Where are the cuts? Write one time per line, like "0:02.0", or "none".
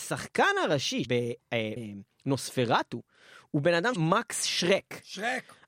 0:01.0
0:01.8
0:04.0